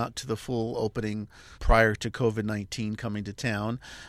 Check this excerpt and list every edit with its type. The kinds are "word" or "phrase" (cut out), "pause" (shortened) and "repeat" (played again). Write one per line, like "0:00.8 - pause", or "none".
0:01.6 - word